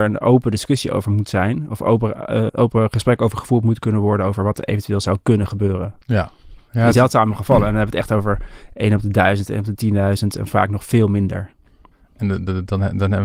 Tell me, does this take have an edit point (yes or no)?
yes